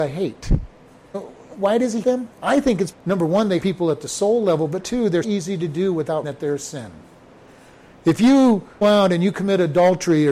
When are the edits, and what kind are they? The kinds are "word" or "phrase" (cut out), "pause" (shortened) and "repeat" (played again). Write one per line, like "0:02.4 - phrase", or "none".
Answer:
0:01.1 - word
0:02.0 - word
0:02.9 - word
0:03.6 - word
0:04.8 - word
0:05.2 - word
0:06.2 - word
0:08.8 - word